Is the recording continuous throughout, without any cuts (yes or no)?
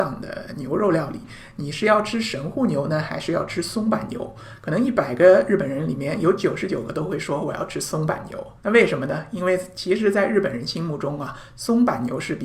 no